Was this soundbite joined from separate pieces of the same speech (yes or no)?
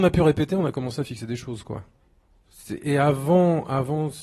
no